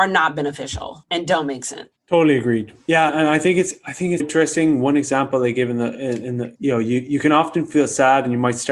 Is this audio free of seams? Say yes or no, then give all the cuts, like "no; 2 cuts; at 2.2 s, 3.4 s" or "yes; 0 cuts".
no; 4 cuts; at 2.0 s, 3.1 s, 4.2 s, 6.6 s